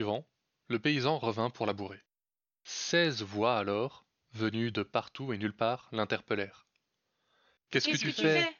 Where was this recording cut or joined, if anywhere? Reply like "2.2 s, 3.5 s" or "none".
none